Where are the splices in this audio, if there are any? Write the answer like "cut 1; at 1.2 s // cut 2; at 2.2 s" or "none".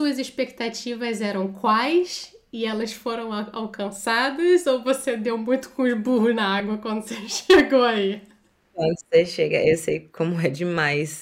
none